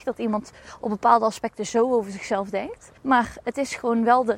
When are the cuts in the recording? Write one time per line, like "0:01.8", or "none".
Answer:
0:03.0